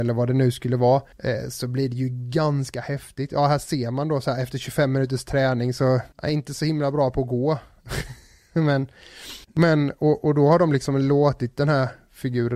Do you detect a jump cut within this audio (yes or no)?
yes